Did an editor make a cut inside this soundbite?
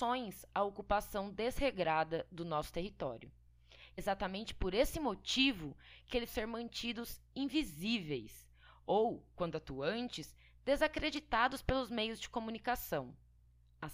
yes; 2 cuts; at 4.0 s, 6.3 s

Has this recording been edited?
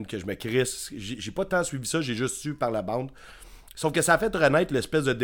no; 0 cuts

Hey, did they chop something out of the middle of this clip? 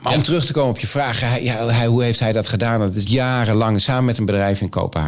yes; 1 cut; at 3.1 s

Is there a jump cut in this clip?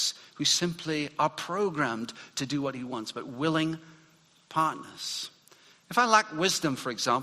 no; 0 cuts

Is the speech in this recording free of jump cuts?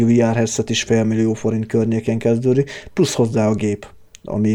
yes; 0 cuts

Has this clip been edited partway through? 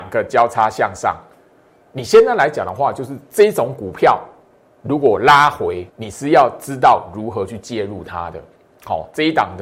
yes; 1 cut; at 5.9 s

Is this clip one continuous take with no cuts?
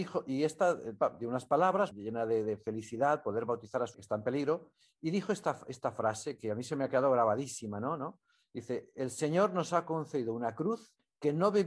no; 3 cuts; at 1.9 s, 3.9 s, 6.4 s

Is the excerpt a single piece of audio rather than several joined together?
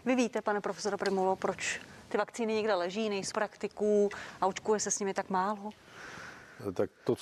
no; 1 cut; at 3.3 s

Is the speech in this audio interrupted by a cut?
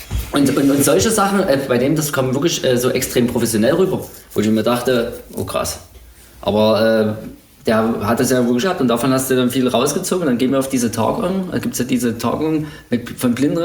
yes; 1 cut; at 8.6 s

